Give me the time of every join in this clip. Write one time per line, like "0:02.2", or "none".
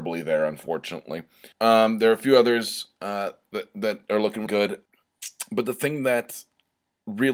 0:01.5
0:04.5